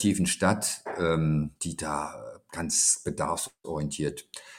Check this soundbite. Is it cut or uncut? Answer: cut